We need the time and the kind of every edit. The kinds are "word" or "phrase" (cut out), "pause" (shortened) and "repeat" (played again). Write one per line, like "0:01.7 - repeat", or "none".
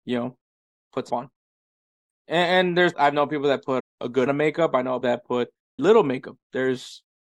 0:01.1 - word
0:02.9 - word
0:03.8 - word
0:04.3 - word
0:05.0 - word
0:05.8 - word